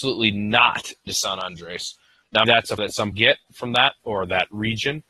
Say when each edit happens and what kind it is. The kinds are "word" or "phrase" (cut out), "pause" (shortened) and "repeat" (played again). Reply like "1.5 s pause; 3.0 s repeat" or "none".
1.1 s word; 2.4 s word; 2.8 s word; 3.1 s word; 4.0 s word